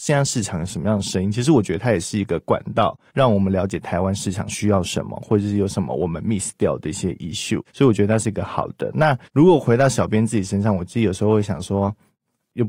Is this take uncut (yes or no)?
no